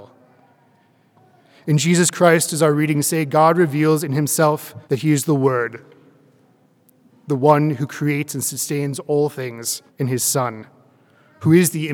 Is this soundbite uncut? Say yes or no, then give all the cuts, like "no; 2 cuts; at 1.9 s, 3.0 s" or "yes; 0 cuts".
no; 2 cuts; at 4.8 s, 9.9 s